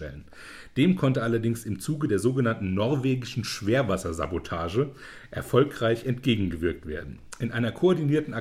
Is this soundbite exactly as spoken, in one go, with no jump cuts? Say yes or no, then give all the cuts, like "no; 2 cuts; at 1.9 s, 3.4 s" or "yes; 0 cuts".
yes; 0 cuts